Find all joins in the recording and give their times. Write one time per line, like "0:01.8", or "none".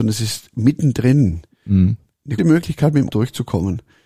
0:02.4
0:03.1

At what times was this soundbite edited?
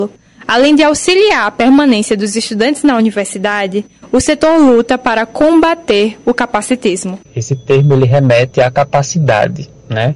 none

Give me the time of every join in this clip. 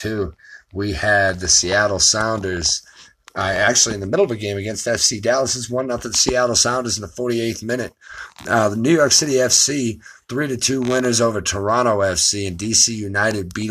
none

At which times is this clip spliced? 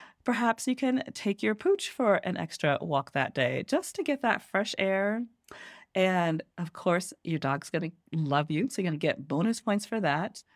none

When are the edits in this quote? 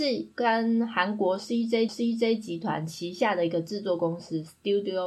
0:01.9

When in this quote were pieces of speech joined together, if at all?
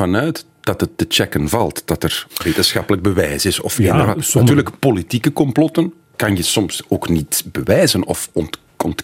0:06.0

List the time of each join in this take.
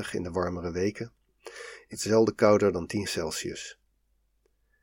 0:01.9
0:03.0

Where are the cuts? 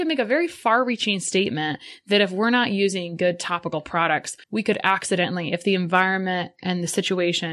0:04.4

